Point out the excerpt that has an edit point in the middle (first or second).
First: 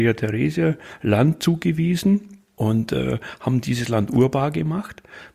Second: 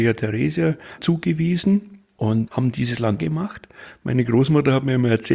second